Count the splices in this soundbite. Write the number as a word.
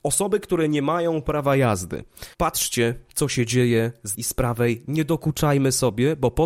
two